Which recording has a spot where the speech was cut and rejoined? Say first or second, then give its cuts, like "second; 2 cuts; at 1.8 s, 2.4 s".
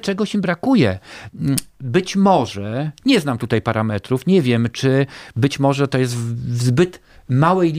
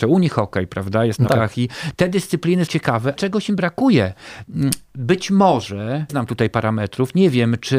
second; 5 cuts; at 1.3 s, 1.9 s, 2.7 s, 3.2 s, 6.1 s